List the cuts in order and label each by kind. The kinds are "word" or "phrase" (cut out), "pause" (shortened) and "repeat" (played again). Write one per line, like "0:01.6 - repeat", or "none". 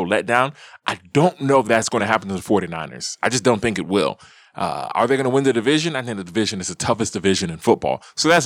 none